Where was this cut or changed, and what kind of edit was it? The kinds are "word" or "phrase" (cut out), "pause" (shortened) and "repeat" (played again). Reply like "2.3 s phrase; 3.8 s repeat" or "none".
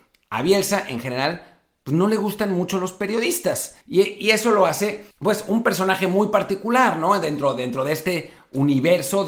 3.8 s pause; 5.1 s pause